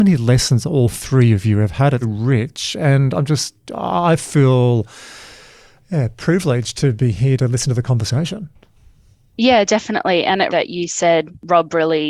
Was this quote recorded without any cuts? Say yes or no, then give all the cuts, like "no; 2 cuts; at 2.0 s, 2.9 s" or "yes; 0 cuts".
no; 3 cuts; at 2.0 s, 3.6 s, 10.5 s